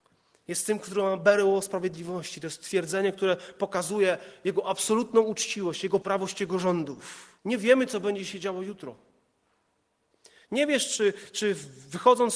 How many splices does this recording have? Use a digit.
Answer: 2